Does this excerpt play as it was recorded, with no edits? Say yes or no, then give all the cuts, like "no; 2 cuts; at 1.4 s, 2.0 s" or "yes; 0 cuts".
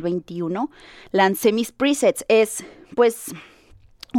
yes; 0 cuts